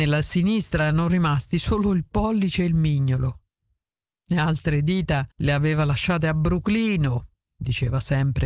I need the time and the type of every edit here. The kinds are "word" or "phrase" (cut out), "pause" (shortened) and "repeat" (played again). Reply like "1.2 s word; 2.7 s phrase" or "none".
5.3 s pause